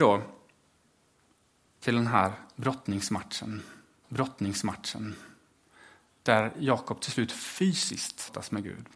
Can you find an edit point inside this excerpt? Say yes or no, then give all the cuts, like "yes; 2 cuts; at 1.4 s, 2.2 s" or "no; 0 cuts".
yes; 1 cut; at 4.0 s